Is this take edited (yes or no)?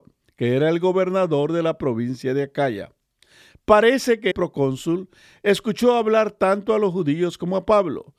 yes